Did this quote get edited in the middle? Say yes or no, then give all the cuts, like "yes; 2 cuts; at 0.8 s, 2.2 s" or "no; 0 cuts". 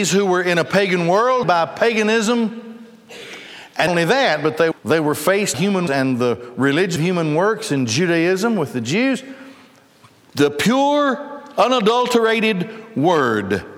yes; 6 cuts; at 1.4 s, 3.9 s, 4.7 s, 5.5 s, 5.9 s, 7.0 s